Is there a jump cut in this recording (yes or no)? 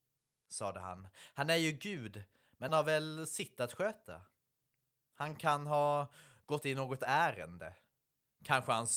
yes